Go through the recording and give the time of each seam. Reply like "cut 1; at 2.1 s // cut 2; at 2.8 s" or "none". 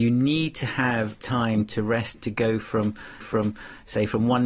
cut 1; at 1.2 s // cut 2; at 2.1 s // cut 3; at 3.2 s